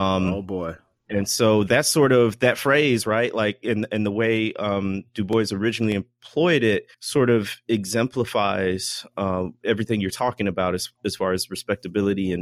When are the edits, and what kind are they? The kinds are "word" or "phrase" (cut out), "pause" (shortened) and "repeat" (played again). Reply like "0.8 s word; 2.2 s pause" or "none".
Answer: 6.9 s pause